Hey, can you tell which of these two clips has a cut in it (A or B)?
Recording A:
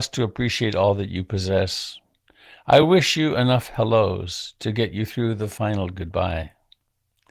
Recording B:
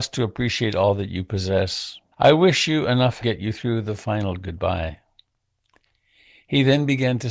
B